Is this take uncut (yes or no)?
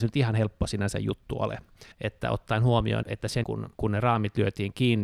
no